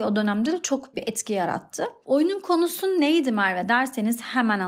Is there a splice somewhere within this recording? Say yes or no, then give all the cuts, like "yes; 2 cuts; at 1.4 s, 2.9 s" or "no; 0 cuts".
yes; 1 cut; at 0.9 s